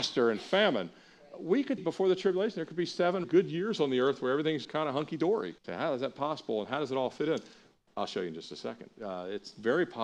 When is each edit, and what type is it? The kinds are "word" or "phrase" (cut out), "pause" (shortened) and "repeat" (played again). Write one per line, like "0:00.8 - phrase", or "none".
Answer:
0:01.8 - word
0:03.2 - word
0:04.6 - word
0:05.6 - pause